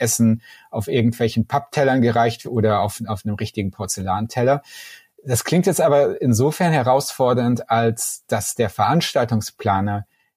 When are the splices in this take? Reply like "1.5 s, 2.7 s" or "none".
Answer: 2.4 s